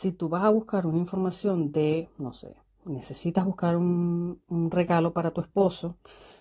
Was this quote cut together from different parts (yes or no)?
no